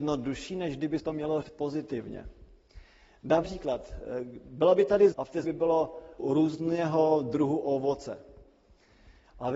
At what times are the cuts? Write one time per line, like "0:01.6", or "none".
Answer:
0:01.0
0:01.4
0:03.4
0:05.1
0:05.4
0:06.2